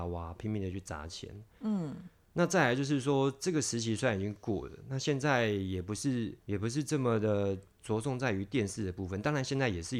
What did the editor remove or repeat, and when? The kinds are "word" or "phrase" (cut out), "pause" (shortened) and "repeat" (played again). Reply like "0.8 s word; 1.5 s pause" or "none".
6.4 s pause